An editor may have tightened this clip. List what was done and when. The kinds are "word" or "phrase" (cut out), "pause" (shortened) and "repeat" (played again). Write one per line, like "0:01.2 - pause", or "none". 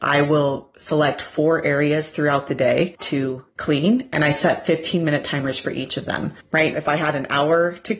0:03.0 - phrase
0:06.7 - word